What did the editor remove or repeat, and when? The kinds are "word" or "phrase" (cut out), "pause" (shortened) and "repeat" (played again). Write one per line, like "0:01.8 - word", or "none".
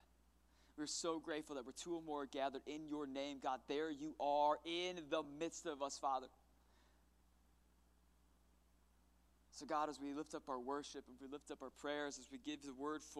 none